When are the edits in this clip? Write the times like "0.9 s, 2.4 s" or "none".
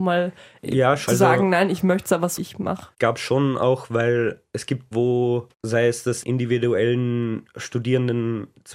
1.1 s, 2.4 s, 2.9 s, 4.9 s, 5.5 s, 6.2 s